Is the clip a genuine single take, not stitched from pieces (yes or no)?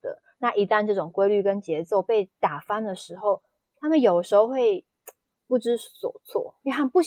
yes